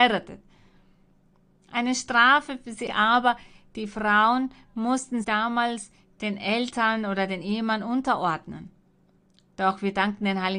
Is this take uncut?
no; 2 cuts; at 2.9 s, 5.2 s

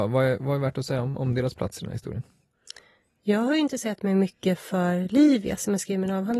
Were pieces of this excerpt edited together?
no; 0 cuts

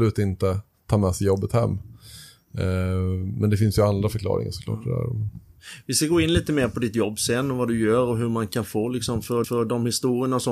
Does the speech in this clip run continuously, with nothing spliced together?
no; 1 cut; at 9.4 s

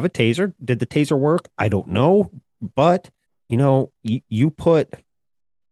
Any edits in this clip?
yes; 1 cut; at 3.3 s

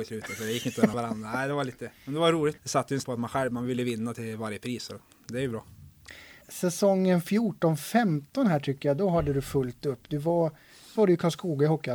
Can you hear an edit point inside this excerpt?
yes; 5 cuts; at 0.9 s, 2.6 s, 3.0 s, 6.4 s, 11.0 s

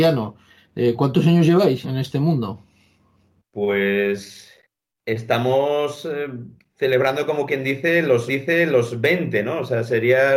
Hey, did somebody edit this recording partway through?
yes; 3 cuts; at 1.8 s, 4.6 s, 8.3 s

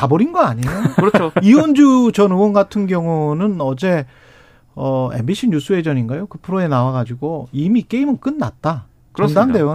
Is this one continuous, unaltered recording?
yes; 0 cuts

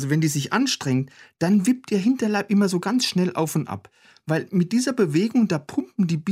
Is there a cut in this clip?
no; 0 cuts

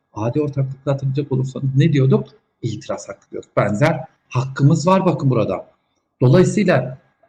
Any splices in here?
yes; 1 cut; at 4.3 s

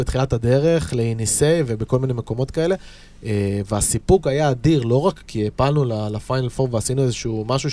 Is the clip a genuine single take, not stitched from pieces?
no; 1 cut; at 5.3 s

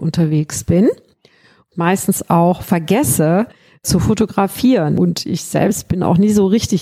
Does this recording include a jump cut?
no; 0 cuts

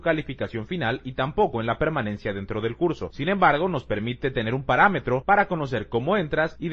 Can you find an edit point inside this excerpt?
no; 0 cuts

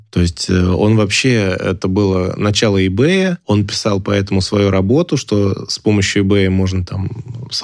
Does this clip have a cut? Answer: no; 0 cuts

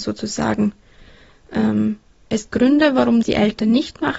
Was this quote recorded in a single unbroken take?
no; 2 cuts; at 2.5 s, 3.2 s

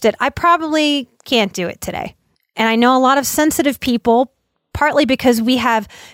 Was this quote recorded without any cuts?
yes; 0 cuts

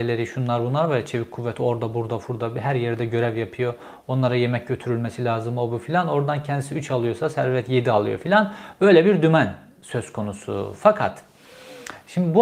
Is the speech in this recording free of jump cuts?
yes; 0 cuts

